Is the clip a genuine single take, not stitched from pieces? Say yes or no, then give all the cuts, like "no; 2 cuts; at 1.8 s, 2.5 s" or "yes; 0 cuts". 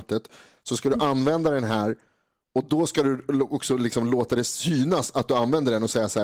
yes; 0 cuts